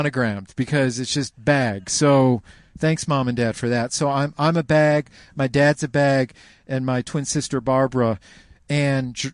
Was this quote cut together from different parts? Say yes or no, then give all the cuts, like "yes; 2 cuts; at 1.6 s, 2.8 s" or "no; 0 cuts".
no; 0 cuts